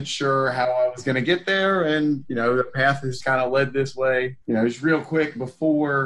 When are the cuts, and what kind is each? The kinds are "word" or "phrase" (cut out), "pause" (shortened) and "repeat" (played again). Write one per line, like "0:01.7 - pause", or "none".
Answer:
0:03.2 - word
0:04.4 - pause